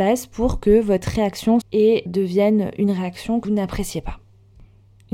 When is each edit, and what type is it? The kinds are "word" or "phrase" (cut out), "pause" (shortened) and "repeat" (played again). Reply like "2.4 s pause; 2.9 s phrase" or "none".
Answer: 1.6 s word; 2.1 s word; 3.4 s word

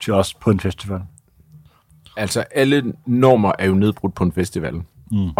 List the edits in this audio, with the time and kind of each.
none

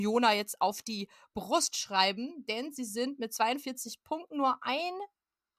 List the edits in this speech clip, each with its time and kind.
none

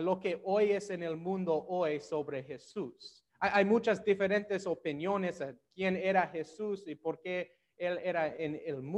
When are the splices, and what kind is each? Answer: 3.3 s pause

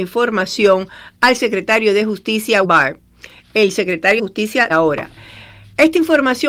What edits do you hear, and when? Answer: 2.6 s word; 4.2 s word; 4.7 s word

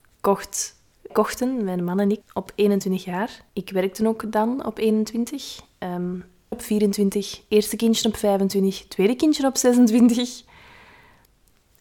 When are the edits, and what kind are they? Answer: 1.1 s word; 2.2 s phrase; 3.5 s pause; 6.5 s phrase

